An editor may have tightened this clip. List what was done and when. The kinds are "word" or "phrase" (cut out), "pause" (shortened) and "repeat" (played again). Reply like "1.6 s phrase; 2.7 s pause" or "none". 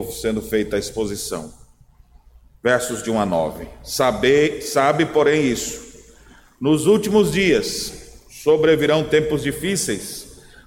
none